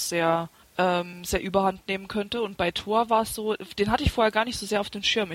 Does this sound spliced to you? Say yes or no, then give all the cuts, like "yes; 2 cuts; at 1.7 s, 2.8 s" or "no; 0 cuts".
no; 0 cuts